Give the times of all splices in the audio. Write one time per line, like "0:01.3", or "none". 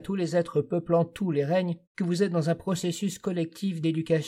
0:01.9